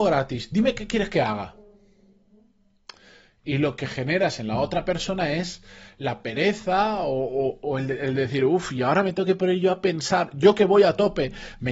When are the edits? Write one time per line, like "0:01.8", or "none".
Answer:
none